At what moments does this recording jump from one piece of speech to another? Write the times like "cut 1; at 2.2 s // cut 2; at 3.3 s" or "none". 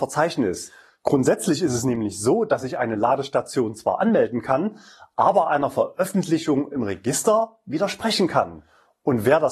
none